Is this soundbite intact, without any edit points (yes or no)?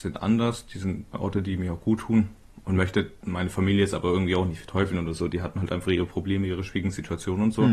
no